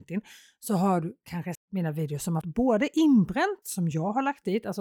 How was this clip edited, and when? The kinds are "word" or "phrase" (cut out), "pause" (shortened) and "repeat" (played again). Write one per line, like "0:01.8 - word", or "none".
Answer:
0:01.5 - word
0:02.4 - word
0:03.6 - word